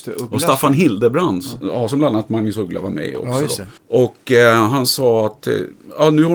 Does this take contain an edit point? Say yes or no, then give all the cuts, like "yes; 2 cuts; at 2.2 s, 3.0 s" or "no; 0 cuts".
yes; 1 cut; at 3.8 s